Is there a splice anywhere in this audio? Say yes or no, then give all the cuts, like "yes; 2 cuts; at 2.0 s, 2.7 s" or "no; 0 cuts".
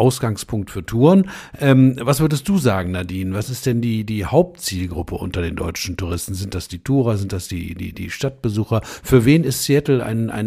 no; 0 cuts